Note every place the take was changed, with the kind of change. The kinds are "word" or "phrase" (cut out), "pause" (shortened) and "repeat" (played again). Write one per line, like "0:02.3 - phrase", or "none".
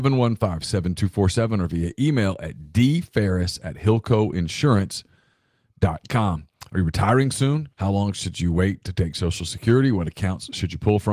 0:07.7 - pause